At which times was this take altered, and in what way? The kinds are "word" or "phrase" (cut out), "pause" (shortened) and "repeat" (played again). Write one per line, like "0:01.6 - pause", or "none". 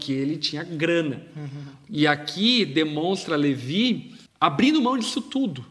0:04.3 - pause